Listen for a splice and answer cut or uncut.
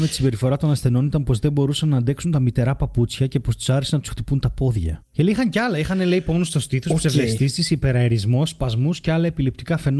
uncut